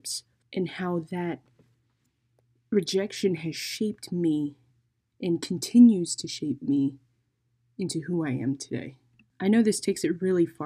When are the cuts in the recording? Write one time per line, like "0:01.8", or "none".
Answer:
none